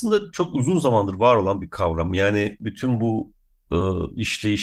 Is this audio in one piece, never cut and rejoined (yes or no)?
yes